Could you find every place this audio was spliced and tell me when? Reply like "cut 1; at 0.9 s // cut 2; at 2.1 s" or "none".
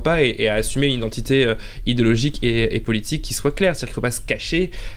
none